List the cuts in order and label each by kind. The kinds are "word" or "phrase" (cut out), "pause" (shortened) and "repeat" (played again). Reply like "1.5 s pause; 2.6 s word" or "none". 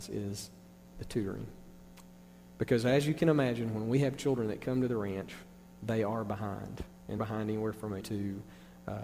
7.2 s word; 8.0 s word